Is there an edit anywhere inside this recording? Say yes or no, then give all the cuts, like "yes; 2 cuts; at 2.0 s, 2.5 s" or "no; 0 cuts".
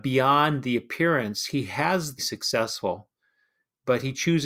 yes; 1 cut; at 2.2 s